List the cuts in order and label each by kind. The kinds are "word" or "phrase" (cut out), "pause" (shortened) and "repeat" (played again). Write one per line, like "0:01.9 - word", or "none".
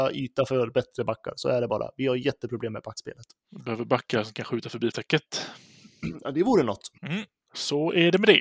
0:04.9 - word
0:07.0 - pause